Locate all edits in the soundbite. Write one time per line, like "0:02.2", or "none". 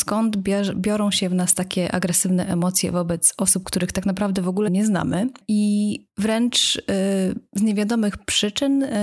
0:04.7

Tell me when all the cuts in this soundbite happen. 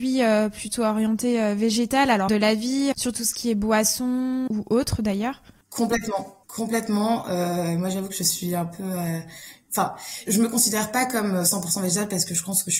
0:02.3
0:02.9
0:04.5
0:06.4
0:10.3

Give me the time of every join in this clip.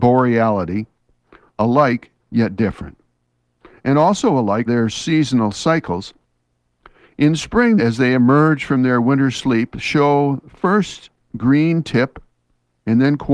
0:02.2
0:03.2
0:04.7
0:07.8

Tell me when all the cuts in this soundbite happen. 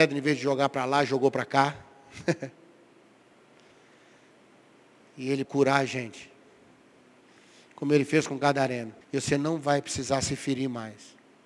0:05.4
0:09.0

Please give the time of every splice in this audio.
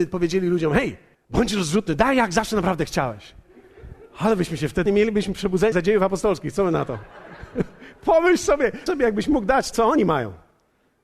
0:01.1
0:04.9
0:05.7
0:08.9
0:09.7

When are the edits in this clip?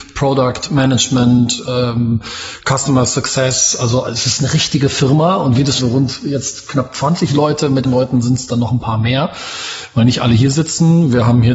0:05.8
0:07.8

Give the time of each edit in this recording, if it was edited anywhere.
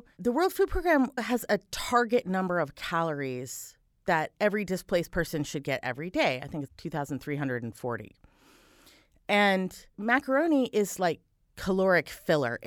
0:01.2
0:06.7
0:09.9

